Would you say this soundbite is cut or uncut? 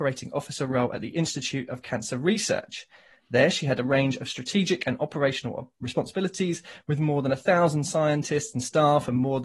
uncut